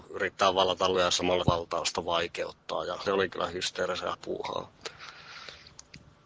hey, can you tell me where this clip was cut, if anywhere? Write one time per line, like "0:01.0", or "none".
0:01.0
0:01.4
0:03.1
0:04.1